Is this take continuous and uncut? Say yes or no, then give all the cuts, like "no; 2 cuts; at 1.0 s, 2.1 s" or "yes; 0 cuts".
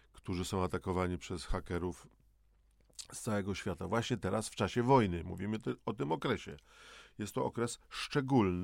yes; 0 cuts